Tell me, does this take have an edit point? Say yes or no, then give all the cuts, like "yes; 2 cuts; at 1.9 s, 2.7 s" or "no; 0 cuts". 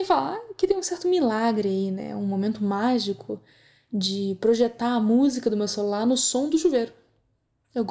no; 0 cuts